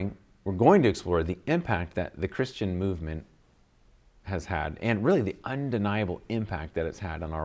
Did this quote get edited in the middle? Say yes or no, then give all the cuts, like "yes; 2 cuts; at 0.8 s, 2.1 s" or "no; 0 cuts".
no; 0 cuts